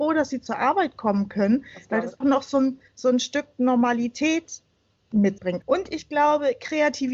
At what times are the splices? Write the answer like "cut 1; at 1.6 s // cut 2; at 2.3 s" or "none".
cut 1; at 2.2 s // cut 2; at 2.9 s // cut 3; at 5.4 s